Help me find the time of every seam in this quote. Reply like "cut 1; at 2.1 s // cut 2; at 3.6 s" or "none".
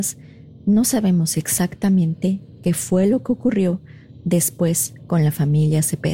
none